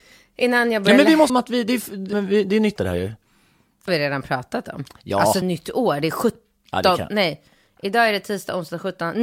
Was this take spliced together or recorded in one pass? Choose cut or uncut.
cut